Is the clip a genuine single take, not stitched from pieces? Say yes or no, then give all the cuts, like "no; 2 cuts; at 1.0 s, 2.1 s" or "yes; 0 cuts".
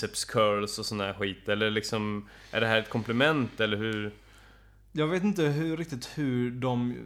yes; 0 cuts